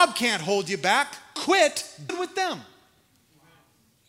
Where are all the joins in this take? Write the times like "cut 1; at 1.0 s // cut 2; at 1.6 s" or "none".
cut 1; at 2.1 s